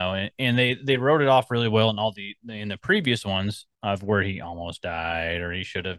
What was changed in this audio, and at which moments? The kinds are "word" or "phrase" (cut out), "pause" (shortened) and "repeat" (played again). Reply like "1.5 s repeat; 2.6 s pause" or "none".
3.7 s pause